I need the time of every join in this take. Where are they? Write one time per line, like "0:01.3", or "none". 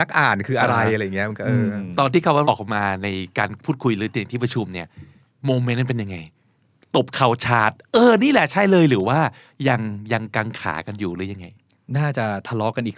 0:02.4

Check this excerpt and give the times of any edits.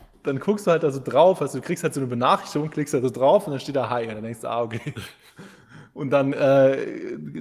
none

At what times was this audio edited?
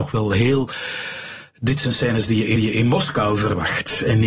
0:02.6

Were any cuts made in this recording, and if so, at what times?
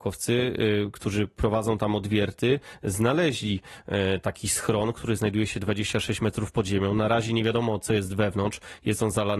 none

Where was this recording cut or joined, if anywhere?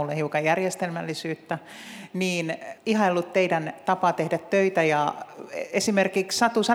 0:02.8

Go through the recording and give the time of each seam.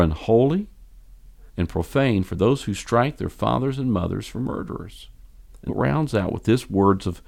0:01.5
0:05.7

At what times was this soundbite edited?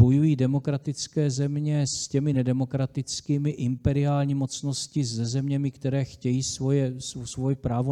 none

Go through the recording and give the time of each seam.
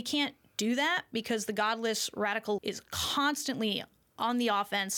0:02.6

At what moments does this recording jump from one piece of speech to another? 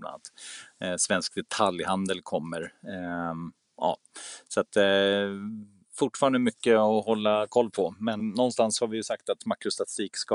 0:08.2

